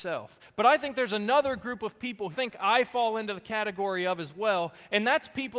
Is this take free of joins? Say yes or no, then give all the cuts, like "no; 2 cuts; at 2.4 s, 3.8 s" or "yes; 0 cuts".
no; 1 cut; at 2.3 s